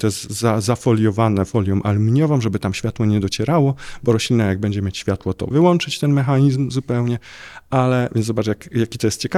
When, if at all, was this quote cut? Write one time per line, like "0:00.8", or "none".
0:05.5

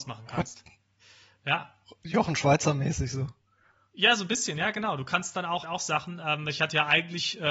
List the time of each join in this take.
0:05.6

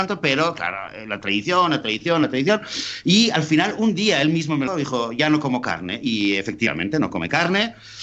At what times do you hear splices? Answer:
0:04.7

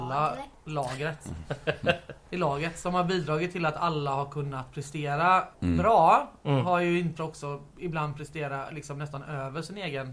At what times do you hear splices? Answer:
0:05.5
0:07.2
0:07.7

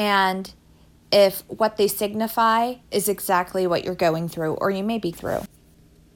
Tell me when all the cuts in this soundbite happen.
0:02.8
0:05.1

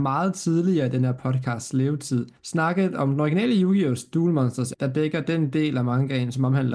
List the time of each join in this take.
0:02.4
0:04.7

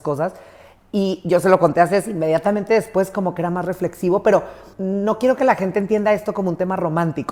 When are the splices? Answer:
0:04.7

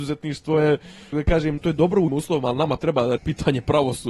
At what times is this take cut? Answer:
0:01.1
0:01.6
0:02.1
0:02.8
0:03.2

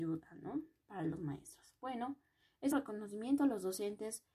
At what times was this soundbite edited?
0:02.7

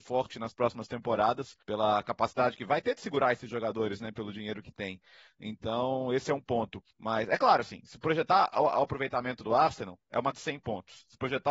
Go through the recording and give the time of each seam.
0:01.6
0:06.9
0:10.3

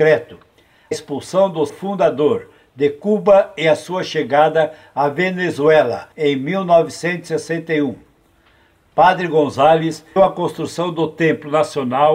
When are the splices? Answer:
0:00.9
0:01.7
0:06.1
0:10.2

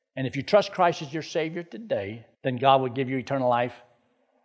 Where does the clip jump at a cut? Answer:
0:02.3

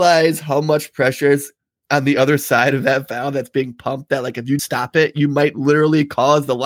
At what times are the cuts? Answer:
0:04.6

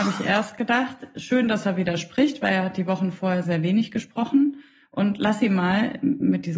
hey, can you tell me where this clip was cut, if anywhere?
0:03.4

